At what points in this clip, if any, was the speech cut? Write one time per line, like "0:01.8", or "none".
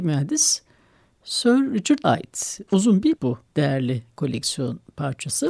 0:02.0
0:03.2
0:03.5